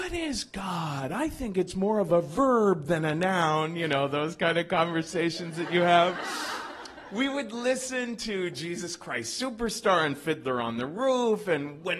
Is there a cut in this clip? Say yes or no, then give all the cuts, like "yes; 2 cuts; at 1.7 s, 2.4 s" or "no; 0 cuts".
no; 0 cuts